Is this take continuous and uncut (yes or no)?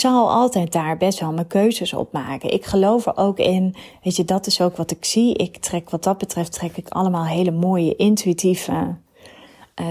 yes